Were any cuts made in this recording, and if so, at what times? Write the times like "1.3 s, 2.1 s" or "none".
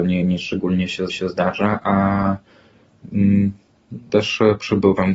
1.1 s, 4.1 s